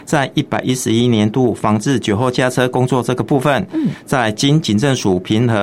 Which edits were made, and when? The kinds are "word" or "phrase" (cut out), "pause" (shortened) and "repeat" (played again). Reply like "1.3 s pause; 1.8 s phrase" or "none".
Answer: none